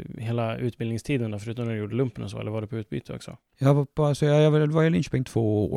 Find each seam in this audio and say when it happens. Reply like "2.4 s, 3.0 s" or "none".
3.5 s